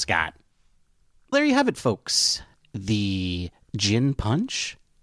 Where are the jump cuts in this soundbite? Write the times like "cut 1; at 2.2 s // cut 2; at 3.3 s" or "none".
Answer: cut 1; at 1.3 s